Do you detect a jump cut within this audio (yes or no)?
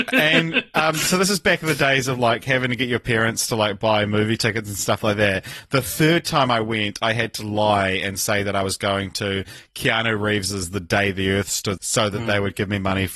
yes